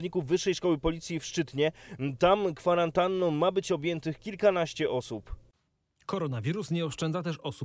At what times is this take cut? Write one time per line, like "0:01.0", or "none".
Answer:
none